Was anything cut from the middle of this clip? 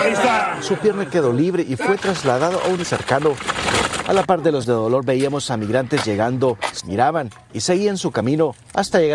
yes; 3 cuts; at 2.8 s, 4.6 s, 6.8 s

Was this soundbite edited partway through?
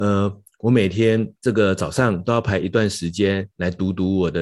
yes; 2 cuts; at 1.4 s, 3.5 s

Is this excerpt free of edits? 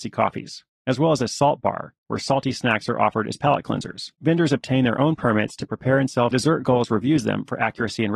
no; 2 cuts; at 4.1 s, 6.3 s

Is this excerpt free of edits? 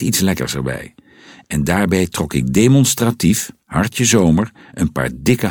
yes; 0 cuts

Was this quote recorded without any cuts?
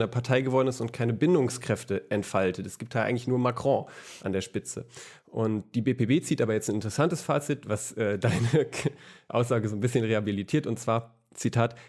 yes; 0 cuts

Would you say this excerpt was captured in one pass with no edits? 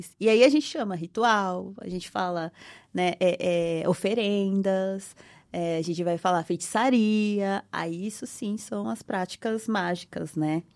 yes; 0 cuts

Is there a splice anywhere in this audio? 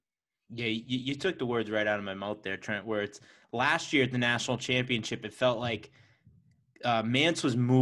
no; 0 cuts

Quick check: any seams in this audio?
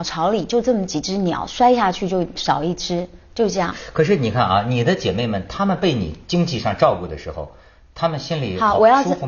no; 0 cuts

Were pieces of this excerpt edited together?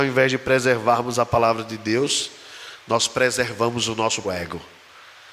yes; 1 cut; at 4.2 s

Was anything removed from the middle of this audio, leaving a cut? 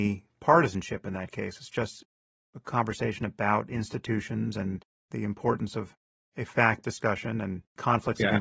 yes; 1 cut; at 6.8 s

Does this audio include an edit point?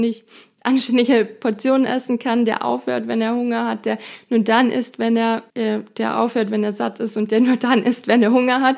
yes; 1 cut; at 5.5 s

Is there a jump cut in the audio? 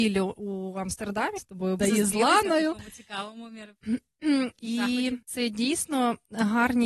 yes; 3 cuts; at 1.4 s, 1.8 s, 5.2 s

